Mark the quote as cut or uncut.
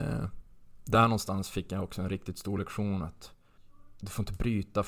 uncut